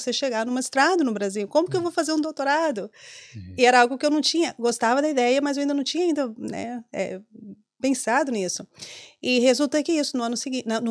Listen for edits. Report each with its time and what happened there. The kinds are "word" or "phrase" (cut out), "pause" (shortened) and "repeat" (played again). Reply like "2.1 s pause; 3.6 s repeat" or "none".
none